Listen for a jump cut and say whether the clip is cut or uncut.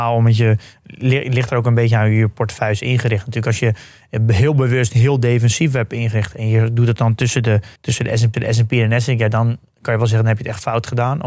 cut